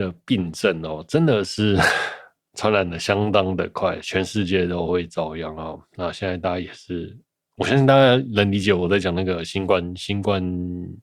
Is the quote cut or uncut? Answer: uncut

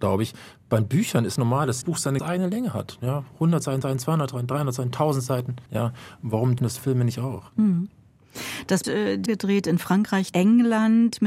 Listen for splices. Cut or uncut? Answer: cut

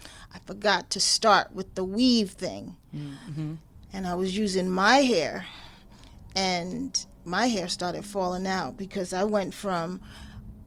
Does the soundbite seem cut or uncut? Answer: cut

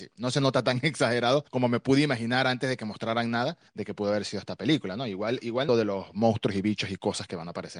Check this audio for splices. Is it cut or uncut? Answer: cut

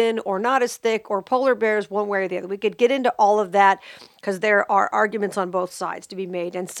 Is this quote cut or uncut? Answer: uncut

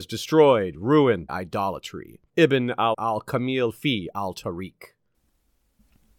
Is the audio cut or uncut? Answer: cut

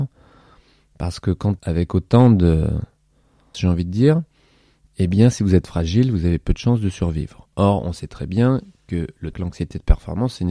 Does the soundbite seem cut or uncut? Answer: cut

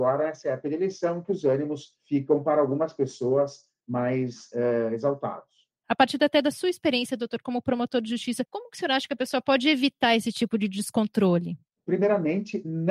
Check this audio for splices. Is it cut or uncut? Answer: uncut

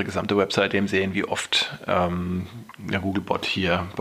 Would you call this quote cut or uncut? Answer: uncut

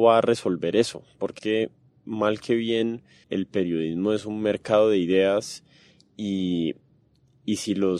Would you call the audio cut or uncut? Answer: cut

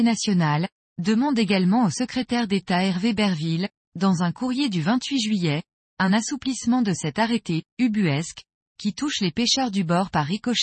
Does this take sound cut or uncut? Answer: uncut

